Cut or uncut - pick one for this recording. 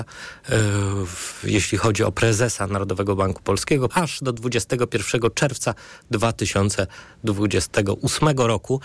cut